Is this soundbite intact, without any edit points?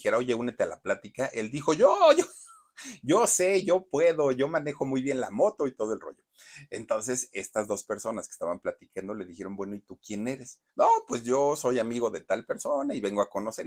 no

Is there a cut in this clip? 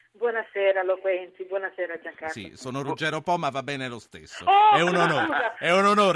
no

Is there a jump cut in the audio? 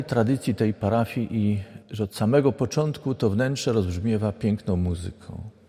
yes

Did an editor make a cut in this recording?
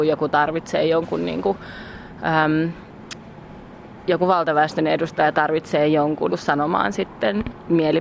yes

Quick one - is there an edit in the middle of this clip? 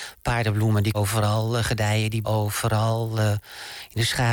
yes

